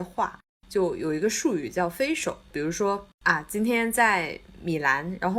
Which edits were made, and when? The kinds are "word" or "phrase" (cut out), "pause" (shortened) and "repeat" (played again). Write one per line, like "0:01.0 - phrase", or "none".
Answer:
0:03.1 - pause